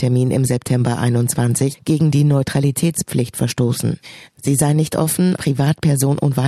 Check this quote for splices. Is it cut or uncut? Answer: cut